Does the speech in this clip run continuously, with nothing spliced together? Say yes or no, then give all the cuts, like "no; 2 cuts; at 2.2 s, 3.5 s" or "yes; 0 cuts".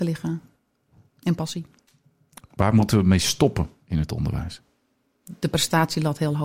yes; 0 cuts